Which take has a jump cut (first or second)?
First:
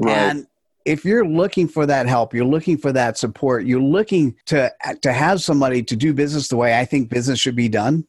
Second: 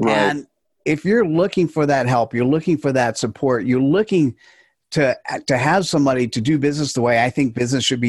first